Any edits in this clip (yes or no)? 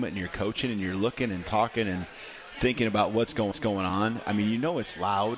yes